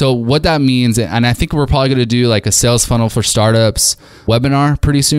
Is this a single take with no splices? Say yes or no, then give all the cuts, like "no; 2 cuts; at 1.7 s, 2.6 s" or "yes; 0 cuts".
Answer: yes; 0 cuts